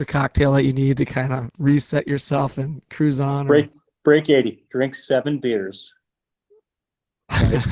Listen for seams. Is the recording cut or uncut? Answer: uncut